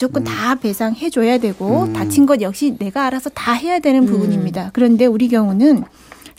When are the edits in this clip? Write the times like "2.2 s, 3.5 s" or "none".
none